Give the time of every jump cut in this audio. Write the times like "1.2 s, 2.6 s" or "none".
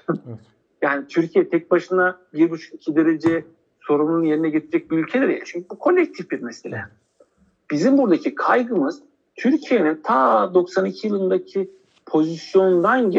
none